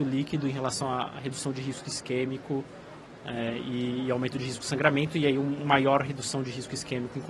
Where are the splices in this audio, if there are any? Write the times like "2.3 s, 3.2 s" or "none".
none